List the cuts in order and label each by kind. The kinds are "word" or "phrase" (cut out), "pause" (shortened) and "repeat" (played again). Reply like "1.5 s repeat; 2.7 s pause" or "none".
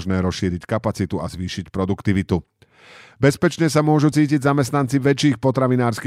none